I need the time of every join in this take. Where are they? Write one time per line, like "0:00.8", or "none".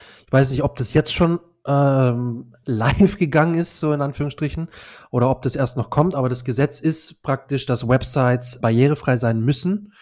0:08.6